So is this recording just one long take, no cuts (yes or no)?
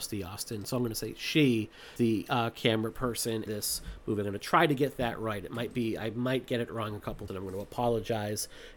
no